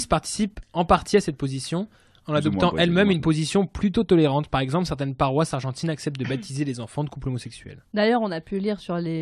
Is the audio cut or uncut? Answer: uncut